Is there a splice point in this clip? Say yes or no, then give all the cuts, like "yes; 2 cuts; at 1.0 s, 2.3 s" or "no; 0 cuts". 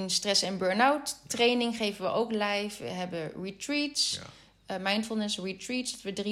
no; 0 cuts